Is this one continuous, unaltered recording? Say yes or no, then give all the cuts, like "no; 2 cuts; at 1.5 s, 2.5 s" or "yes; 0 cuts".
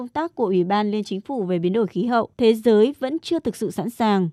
no; 1 cut; at 2.3 s